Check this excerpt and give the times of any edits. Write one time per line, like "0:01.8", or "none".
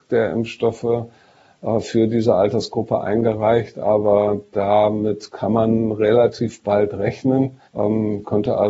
0:07.7